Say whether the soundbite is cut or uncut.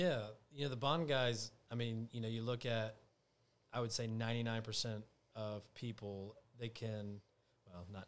uncut